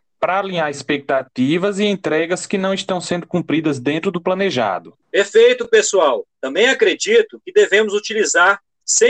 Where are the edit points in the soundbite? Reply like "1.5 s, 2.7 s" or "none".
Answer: 5.0 s, 6.3 s